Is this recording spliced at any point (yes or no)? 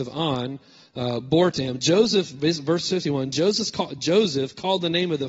no